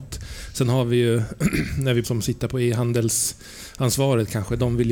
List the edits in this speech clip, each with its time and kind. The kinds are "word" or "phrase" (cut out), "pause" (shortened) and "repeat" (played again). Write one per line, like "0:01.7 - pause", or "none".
0:02.0 - phrase